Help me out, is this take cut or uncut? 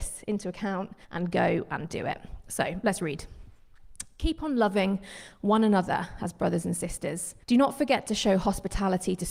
cut